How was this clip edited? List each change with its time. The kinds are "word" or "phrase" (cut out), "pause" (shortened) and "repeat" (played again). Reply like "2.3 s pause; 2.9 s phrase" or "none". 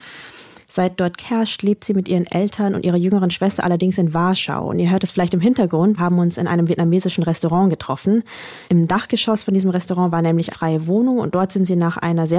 1.2 s word; 6.0 s word; 10.5 s word